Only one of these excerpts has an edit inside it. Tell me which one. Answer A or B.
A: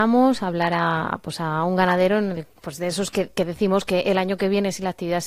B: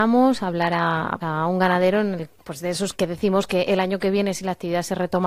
B